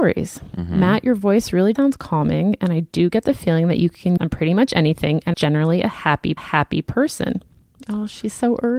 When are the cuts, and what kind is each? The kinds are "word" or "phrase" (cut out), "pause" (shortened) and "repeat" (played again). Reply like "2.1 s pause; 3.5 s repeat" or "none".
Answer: 1.8 s word; 4.2 s phrase; 5.3 s phrase; 6.4 s repeat